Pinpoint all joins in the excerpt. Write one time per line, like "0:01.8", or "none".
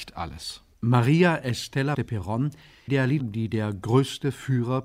0:01.9
0:02.9
0:03.2